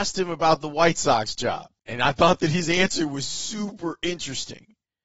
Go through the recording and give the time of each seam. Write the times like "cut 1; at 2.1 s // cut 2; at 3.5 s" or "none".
cut 1; at 1.8 s